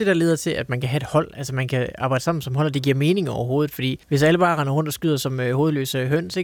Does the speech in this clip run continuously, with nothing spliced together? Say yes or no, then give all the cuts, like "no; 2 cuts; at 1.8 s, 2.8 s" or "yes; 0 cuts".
no; 1 cut; at 4.0 s